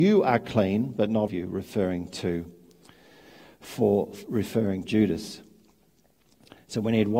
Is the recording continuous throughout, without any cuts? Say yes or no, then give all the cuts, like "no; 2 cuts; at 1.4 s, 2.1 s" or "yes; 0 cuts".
no; 2 cuts; at 1.3 s, 4.8 s